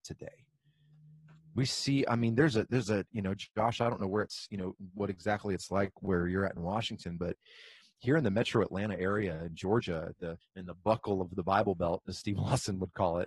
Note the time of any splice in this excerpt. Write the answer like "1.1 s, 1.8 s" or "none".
10.4 s

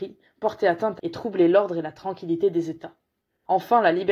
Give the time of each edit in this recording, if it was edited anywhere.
1.0 s

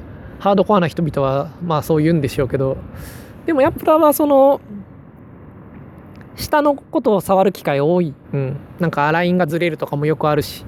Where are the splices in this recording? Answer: 3.7 s, 6.8 s, 8.2 s

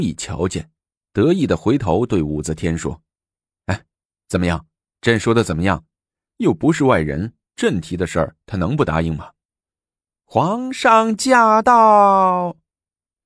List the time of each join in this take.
9.4 s

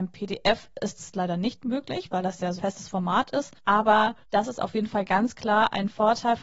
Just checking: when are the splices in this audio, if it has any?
2.6 s

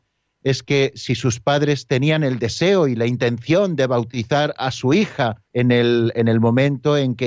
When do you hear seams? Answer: 5.5 s

